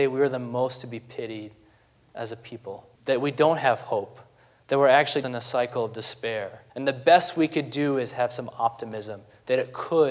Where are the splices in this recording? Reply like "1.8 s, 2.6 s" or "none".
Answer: 3.0 s, 5.2 s, 6.7 s